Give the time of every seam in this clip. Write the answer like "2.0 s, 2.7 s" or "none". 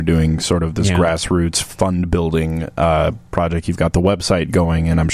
none